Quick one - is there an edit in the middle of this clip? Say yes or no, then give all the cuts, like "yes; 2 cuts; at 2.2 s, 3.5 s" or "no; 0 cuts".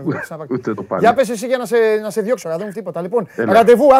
yes; 2 cuts; at 2.4 s, 2.7 s